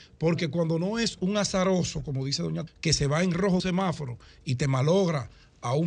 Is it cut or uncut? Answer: cut